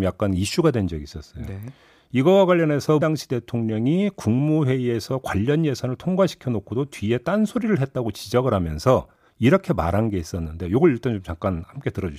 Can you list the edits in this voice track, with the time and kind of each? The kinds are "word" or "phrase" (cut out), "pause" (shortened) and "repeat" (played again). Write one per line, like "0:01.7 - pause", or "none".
0:03.0 - word